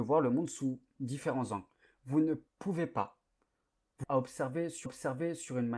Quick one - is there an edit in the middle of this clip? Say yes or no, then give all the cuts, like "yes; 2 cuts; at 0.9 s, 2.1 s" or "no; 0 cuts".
yes; 3 cuts; at 2.5 s, 4.0 s, 4.9 s